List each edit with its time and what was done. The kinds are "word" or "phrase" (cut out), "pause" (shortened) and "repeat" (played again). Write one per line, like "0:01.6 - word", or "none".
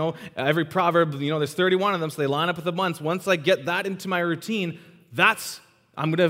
none